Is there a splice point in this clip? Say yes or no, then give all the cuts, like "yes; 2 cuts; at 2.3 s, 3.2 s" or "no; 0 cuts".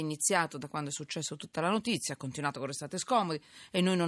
no; 0 cuts